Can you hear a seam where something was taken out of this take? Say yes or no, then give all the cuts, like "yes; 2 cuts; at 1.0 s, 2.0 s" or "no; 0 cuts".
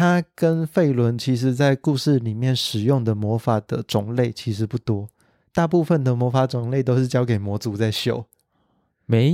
no; 0 cuts